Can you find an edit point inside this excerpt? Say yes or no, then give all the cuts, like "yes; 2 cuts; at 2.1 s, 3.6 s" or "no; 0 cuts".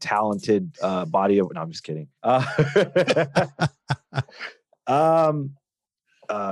yes; 1 cut; at 2.2 s